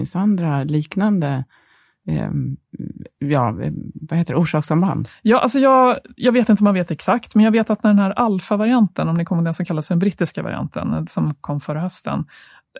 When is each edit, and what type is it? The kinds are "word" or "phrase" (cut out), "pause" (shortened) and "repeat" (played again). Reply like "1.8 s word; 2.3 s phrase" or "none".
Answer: none